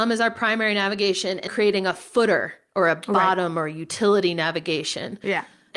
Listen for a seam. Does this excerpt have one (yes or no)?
yes